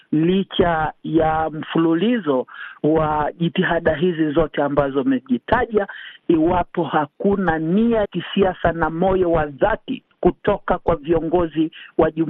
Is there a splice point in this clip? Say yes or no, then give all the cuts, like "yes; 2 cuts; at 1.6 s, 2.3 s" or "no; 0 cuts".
yes; 1 cut; at 8.0 s